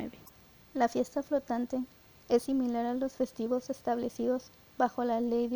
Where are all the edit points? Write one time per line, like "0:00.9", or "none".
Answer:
none